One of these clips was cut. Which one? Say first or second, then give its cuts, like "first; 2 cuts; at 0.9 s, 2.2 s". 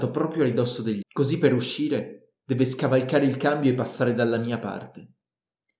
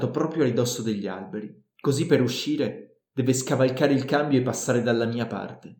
first; 1 cut; at 1.0 s